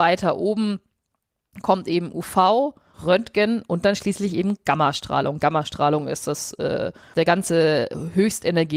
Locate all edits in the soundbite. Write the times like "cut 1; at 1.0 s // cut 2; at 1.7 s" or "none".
cut 1; at 2.9 s // cut 2; at 7.1 s